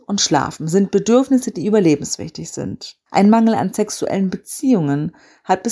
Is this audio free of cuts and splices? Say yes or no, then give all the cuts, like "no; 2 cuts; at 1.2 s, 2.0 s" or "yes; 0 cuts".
no; 1 cut; at 3.1 s